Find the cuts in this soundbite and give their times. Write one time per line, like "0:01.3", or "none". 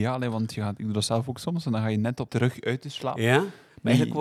0:02.3